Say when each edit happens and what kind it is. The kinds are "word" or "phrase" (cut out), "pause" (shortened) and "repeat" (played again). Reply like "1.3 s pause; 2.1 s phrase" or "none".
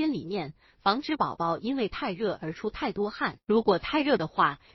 3.4 s pause